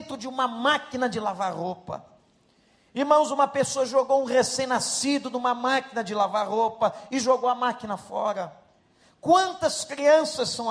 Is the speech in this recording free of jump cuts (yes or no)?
yes